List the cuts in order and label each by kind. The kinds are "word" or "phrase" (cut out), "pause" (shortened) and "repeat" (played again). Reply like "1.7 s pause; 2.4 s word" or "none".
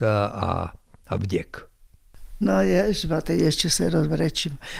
none